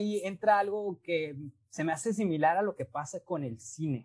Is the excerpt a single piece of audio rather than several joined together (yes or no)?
yes